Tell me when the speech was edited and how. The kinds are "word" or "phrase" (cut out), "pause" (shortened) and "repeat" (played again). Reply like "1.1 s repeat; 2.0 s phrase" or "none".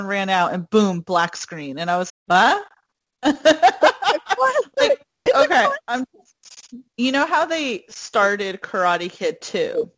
2.1 s word; 5.3 s word; 6.9 s pause